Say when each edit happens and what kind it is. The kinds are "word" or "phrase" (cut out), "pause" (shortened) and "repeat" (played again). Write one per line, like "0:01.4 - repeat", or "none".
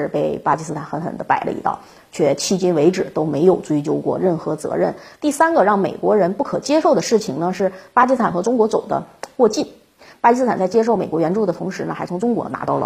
none